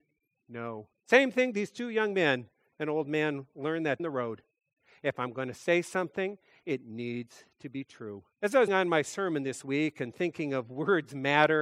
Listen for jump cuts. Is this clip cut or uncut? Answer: cut